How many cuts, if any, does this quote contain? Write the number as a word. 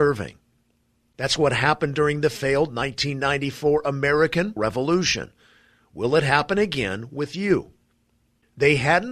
one